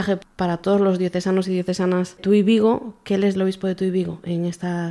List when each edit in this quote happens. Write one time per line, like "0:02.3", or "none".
0:02.2
0:03.3